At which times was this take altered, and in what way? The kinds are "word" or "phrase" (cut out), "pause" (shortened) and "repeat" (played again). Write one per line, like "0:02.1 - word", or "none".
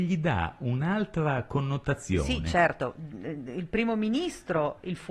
none